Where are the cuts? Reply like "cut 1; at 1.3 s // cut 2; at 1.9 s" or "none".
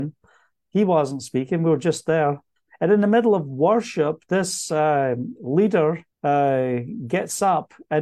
cut 1; at 6.1 s